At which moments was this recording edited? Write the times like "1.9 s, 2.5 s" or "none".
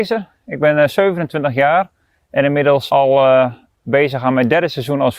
none